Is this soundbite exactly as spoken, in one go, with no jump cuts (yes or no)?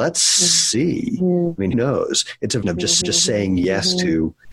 no